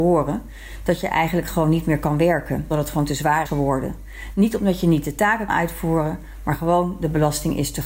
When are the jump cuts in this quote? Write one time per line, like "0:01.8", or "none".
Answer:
0:02.7
0:03.5
0:05.5

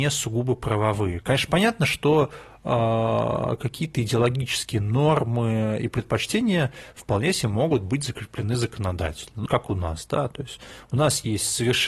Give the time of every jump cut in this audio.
0:09.5

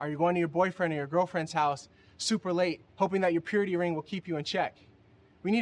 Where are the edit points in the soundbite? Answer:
0:02.9

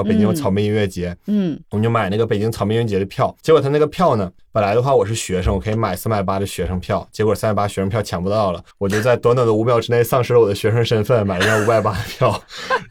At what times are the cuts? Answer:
0:01.6
0:03.4
0:08.7

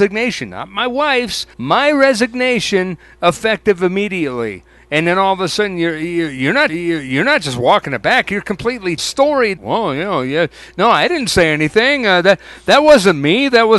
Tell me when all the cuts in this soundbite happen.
0:01.5
0:06.7
0:09.0
0:09.6

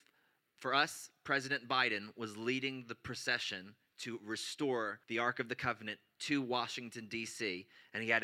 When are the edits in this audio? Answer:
0:05.0

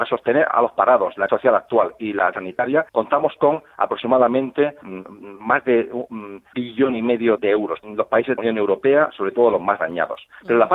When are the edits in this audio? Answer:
0:01.3
0:02.3
0:02.9
0:04.8
0:06.5
0:07.4
0:07.8
0:08.4

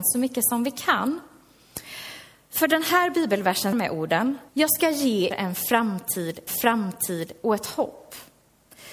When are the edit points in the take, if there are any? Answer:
0:03.7
0:04.5
0:05.3
0:06.5

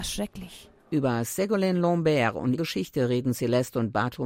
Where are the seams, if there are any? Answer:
0:02.5

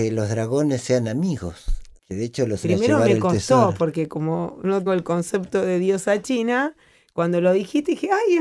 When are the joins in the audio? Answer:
0:02.0
0:02.6
0:04.9

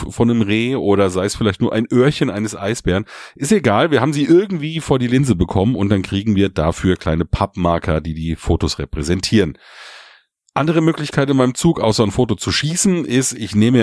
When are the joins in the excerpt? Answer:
none

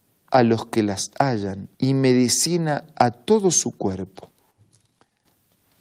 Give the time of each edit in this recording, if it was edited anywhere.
0:01.7

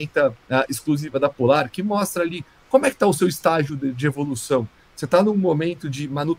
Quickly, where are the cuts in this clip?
none

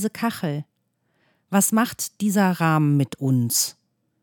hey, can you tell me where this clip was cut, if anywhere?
none

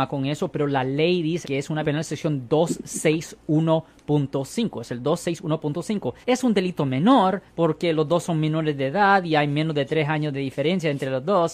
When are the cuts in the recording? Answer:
0:01.4
0:01.8
0:06.2
0:07.5

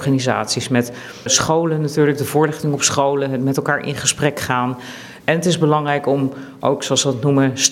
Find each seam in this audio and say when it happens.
0:01.3

